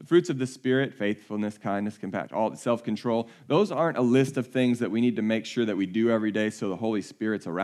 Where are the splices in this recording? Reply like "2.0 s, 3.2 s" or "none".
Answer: none